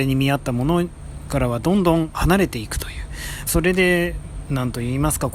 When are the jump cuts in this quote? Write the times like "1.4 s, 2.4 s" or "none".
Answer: 3.5 s